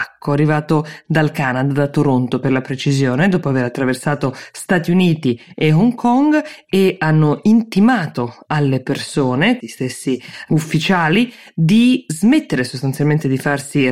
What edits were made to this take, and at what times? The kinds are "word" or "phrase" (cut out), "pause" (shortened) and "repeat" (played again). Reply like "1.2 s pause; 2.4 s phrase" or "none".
9.6 s word